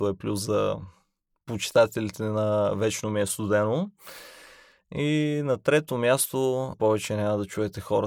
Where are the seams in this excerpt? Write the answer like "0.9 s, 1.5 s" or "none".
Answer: 6.7 s